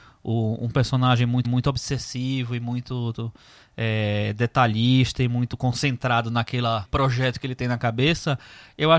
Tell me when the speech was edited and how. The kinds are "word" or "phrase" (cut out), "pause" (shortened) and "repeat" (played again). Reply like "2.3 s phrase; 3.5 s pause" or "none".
1.4 s repeat; 6.8 s word